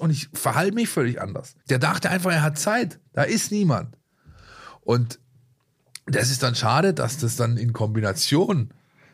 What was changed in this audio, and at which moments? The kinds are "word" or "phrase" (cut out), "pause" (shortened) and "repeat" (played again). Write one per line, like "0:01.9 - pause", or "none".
0:01.6 - pause
0:03.1 - pause